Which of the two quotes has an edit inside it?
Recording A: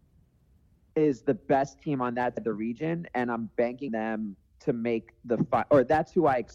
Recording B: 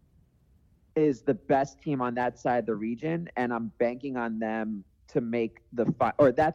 A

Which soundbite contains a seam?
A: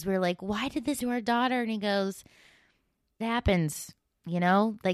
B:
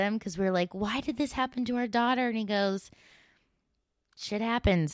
A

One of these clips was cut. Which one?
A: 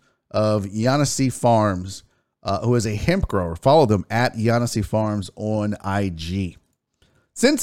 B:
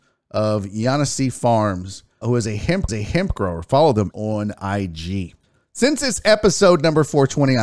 B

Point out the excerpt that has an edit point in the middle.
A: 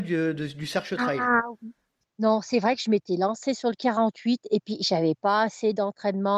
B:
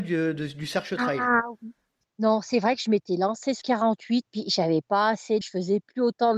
B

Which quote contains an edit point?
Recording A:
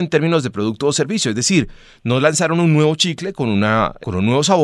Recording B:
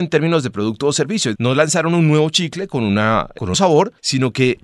B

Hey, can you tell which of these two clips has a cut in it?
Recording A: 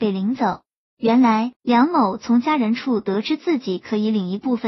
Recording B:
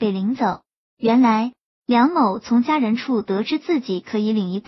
A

